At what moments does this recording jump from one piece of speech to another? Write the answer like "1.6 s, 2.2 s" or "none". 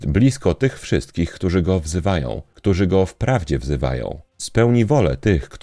none